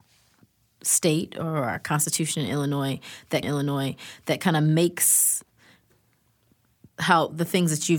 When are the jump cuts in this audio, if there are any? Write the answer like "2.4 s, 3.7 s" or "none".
3.4 s, 6.9 s